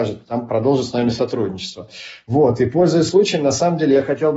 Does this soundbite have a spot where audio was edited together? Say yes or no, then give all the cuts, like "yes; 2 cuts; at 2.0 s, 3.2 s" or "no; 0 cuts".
no; 0 cuts